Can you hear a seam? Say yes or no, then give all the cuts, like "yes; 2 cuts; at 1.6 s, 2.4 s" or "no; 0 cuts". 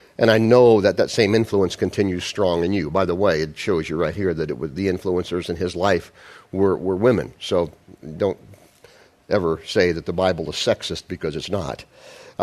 no; 0 cuts